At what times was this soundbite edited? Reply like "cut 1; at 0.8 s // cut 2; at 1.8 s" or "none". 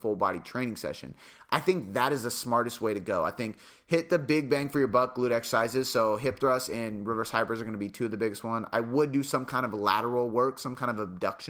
none